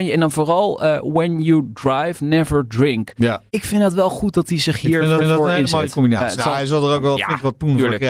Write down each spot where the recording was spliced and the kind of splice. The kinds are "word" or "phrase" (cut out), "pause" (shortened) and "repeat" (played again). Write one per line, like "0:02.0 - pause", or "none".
0:03.5 - pause
0:05.2 - repeat